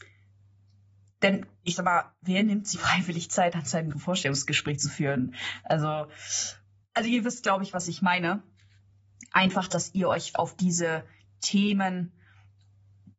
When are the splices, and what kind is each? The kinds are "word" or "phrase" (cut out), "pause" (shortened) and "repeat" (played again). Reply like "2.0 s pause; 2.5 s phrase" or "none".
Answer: 2.7 s word; 3.9 s word; 6.8 s word; 10.3 s word